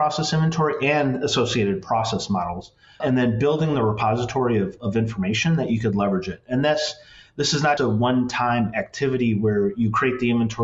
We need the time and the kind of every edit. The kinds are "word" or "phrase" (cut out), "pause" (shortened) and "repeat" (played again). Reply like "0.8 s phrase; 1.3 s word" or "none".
3.0 s word; 7.8 s word